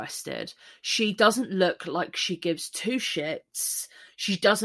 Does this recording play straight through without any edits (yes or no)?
yes